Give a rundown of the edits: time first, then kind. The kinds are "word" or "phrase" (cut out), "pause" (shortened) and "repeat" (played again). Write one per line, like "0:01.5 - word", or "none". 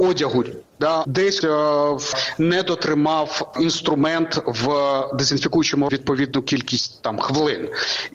0:01.0 - word
0:01.4 - word
0:03.5 - word
0:05.9 - word